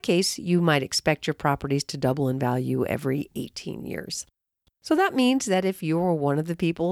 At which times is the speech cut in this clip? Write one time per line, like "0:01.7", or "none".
none